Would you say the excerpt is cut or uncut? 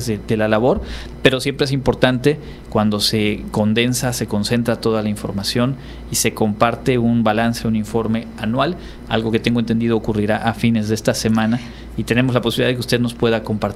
uncut